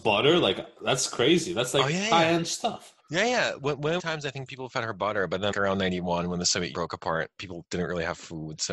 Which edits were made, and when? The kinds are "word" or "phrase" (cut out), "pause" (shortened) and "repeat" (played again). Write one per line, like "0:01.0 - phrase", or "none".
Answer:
0:03.0 - pause
0:04.0 - phrase
0:05.5 - word
0:06.7 - word